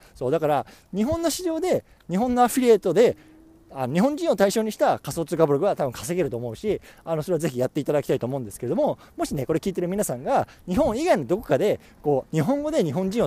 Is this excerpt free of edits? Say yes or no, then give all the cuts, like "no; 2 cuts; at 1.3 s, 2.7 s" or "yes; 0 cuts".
yes; 0 cuts